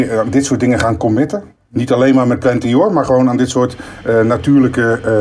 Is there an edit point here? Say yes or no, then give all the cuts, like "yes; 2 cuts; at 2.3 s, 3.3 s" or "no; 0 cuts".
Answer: yes; 1 cut; at 1.6 s